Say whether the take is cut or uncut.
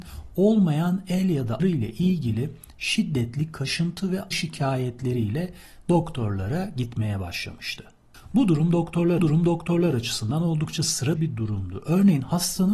cut